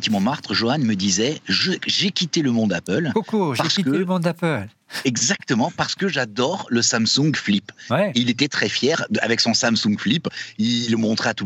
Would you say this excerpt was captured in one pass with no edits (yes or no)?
yes